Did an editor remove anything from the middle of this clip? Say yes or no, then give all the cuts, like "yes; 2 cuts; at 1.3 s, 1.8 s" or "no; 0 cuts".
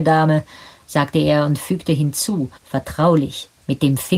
yes; 1 cut; at 2.6 s